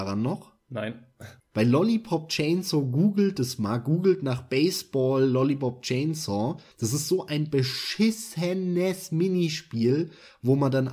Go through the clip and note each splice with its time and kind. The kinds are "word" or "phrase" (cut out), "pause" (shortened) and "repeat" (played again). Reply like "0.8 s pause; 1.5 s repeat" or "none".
1.4 s pause; 6.7 s pause